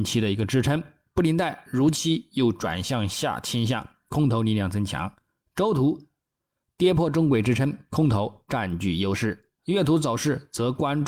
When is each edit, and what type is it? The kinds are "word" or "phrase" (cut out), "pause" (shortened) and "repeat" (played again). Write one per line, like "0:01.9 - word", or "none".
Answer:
none